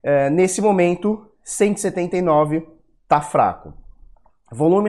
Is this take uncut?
yes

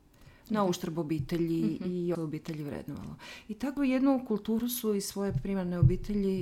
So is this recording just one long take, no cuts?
no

